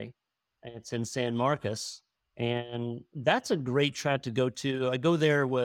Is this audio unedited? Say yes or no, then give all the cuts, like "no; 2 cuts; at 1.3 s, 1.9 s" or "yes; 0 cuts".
yes; 0 cuts